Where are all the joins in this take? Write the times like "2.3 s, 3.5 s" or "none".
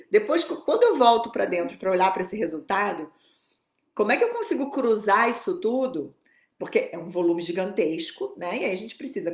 none